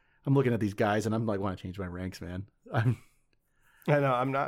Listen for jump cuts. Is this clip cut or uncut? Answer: uncut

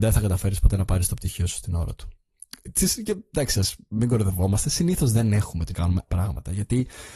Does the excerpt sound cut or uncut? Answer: cut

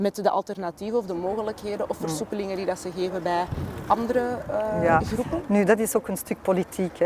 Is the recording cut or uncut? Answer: uncut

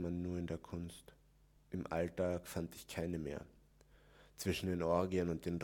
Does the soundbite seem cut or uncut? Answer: uncut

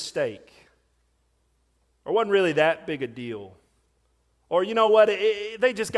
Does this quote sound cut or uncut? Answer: uncut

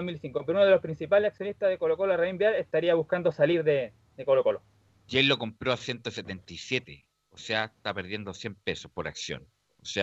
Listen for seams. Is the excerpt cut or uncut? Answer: uncut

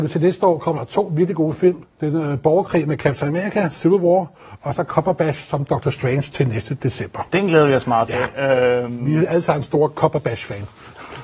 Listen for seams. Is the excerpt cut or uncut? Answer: cut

